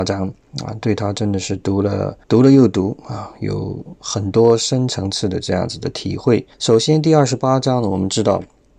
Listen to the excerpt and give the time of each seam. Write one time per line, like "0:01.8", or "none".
0:02.2
0:06.5